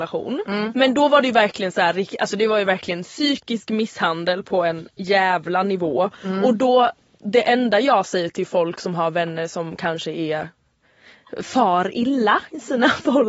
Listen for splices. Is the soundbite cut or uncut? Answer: uncut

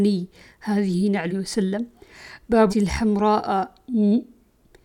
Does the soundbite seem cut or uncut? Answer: cut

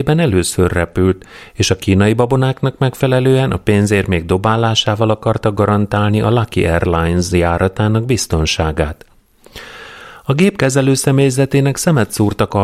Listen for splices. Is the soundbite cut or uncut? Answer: uncut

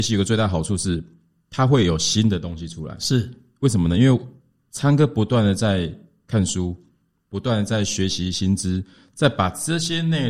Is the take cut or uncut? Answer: uncut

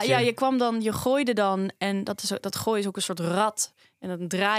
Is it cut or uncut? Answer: uncut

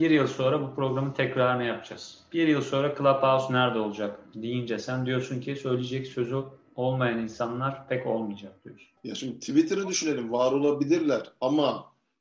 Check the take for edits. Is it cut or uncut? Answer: cut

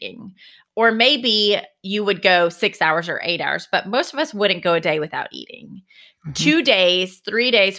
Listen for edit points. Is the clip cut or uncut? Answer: uncut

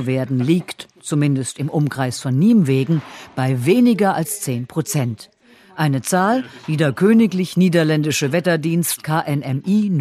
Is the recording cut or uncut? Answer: uncut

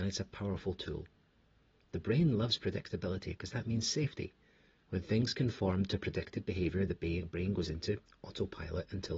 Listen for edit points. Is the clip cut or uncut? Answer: uncut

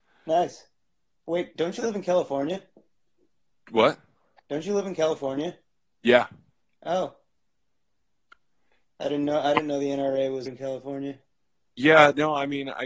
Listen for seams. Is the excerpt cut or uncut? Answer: cut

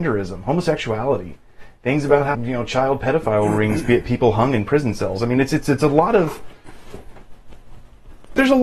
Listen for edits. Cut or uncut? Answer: cut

